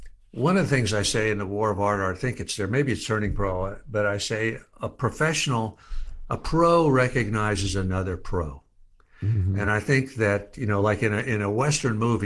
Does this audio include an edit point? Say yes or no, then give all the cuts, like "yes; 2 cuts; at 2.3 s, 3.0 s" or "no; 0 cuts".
no; 0 cuts